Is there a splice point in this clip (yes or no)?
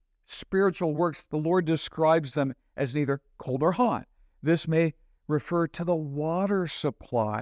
no